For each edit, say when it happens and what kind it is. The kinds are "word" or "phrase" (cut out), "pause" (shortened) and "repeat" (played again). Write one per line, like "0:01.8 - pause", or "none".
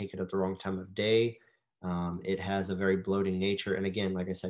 none